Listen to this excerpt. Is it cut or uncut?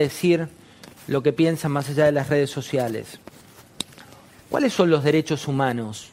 uncut